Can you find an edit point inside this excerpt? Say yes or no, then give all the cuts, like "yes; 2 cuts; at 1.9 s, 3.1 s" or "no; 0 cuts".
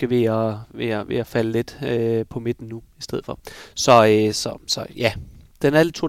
no; 0 cuts